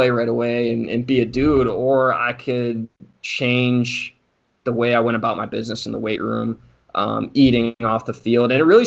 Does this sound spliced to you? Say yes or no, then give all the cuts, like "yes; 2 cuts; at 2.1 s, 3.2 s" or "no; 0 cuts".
no; 0 cuts